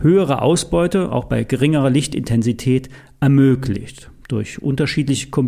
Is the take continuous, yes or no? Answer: yes